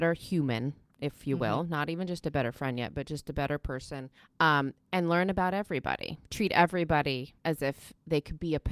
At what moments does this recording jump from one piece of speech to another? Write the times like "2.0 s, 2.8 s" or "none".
4.2 s, 6.2 s, 7.4 s